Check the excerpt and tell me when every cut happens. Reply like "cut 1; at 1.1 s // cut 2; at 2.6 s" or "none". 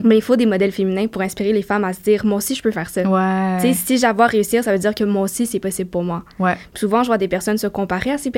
none